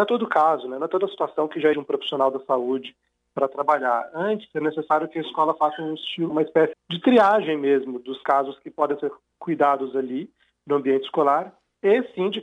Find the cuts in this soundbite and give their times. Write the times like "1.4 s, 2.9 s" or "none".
1.7 s, 6.3 s, 6.7 s